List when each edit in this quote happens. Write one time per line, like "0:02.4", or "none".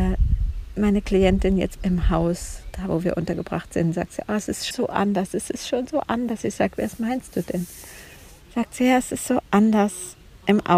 0:01.8
0:04.7